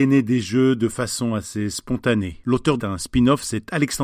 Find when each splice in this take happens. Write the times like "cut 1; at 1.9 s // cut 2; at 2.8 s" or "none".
cut 1; at 2.8 s